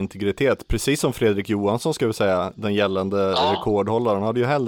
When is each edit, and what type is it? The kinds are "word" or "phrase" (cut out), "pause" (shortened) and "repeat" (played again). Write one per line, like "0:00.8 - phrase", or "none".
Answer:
none